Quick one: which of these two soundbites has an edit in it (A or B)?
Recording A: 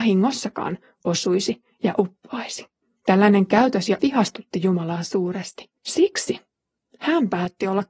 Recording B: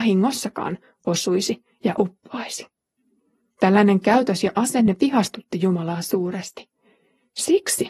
A